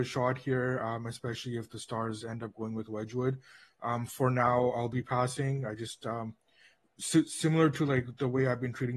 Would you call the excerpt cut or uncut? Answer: uncut